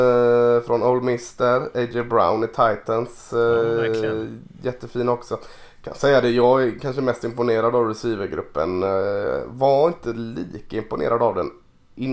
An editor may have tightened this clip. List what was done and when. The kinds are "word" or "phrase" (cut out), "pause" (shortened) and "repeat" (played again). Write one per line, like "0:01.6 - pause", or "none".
none